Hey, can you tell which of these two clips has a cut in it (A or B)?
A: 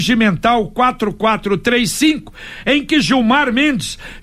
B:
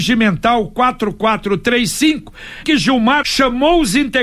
B